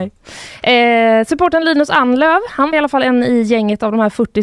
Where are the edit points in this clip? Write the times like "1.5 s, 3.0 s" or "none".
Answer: 2.7 s